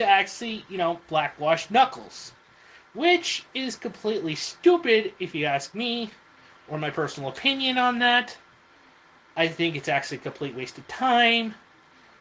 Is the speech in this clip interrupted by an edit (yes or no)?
no